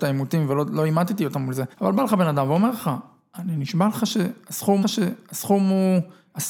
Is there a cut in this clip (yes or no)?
yes